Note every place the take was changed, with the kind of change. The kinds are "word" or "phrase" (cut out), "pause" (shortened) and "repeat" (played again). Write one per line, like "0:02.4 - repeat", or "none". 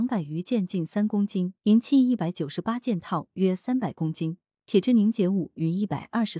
0:01.6 - pause